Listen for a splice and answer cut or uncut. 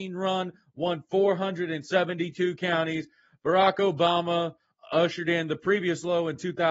uncut